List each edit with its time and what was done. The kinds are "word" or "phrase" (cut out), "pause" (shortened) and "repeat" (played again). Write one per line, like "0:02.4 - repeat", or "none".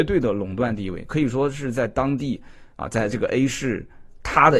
0:02.7 - pause